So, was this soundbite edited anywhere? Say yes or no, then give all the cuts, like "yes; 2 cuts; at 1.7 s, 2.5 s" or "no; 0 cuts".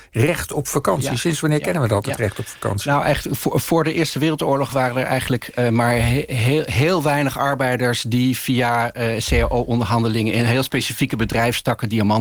no; 0 cuts